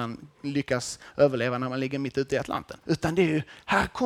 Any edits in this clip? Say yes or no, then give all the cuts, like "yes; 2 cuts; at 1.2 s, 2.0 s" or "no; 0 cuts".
yes; 1 cut; at 2.8 s